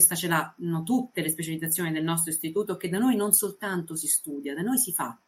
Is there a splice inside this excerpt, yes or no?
no